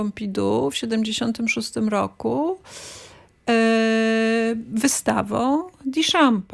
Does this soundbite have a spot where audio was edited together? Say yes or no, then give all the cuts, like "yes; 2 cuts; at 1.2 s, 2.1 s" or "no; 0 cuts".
no; 0 cuts